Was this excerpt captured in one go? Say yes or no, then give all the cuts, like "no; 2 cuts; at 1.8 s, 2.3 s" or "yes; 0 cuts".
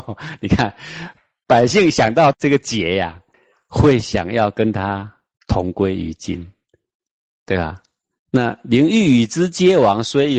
yes; 0 cuts